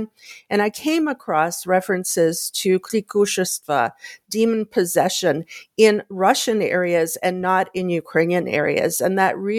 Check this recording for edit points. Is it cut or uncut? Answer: uncut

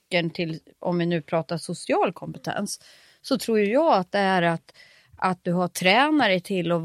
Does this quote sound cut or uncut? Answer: uncut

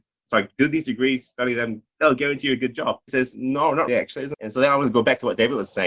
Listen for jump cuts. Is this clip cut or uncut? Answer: cut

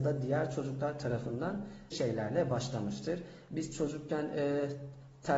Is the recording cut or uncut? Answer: cut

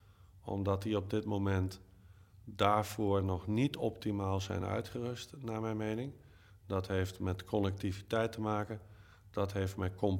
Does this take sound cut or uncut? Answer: uncut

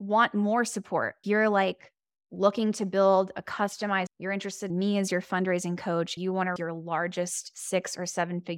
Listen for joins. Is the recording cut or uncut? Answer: cut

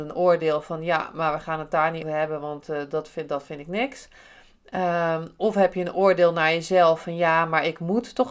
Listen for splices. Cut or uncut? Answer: cut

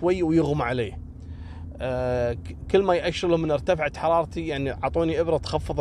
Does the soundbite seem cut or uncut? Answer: uncut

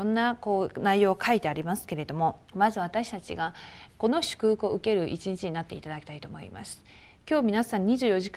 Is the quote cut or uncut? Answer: cut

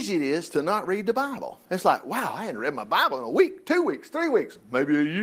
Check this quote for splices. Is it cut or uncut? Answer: cut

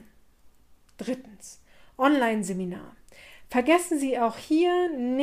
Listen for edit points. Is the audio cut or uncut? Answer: uncut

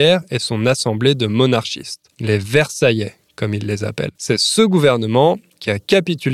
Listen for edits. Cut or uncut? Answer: cut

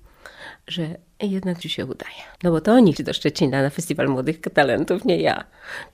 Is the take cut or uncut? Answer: cut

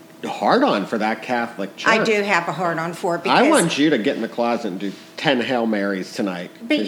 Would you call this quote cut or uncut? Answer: uncut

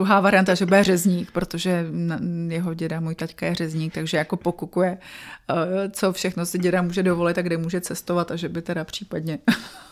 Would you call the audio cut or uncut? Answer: uncut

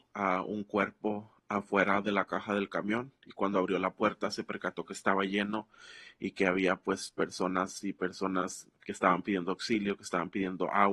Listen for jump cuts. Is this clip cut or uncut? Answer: cut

